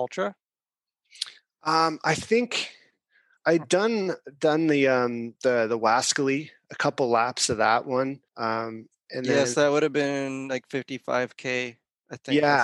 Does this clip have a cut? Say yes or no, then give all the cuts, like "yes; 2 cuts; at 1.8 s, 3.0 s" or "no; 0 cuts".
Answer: yes; 1 cut; at 8.3 s